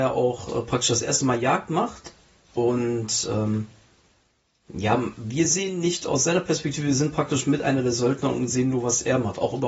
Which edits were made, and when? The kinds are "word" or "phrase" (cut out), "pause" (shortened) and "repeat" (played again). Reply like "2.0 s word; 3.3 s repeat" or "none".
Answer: none